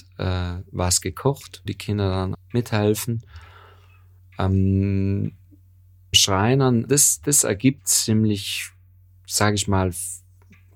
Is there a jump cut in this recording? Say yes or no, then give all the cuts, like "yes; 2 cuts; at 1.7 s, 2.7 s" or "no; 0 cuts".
yes; 5 cuts; at 1.7 s, 2.3 s, 6.1 s, 6.9 s, 7.8 s